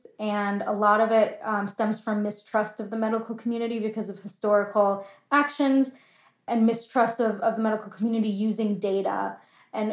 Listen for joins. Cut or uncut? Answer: uncut